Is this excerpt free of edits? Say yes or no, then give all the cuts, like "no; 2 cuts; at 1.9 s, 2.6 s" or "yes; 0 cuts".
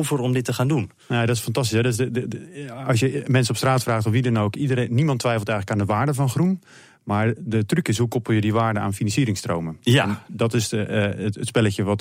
yes; 0 cuts